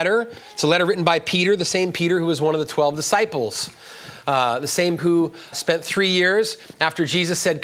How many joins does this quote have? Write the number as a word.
two